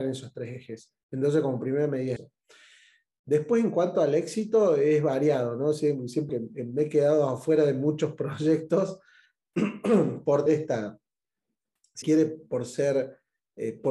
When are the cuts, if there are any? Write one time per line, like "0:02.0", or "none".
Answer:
0:02.2
0:06.3
0:10.5
0:12.0